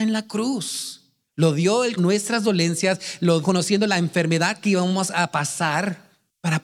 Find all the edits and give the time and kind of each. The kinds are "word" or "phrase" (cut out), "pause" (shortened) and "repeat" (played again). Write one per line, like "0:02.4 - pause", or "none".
0:02.0 - word
0:03.4 - word